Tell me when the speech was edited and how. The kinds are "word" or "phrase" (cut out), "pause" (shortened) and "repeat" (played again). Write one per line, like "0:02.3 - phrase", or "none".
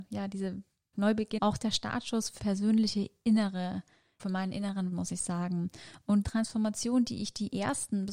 0:00.9 - word
0:01.4 - word
0:02.4 - word
0:04.2 - word
0:04.9 - word
0:06.2 - word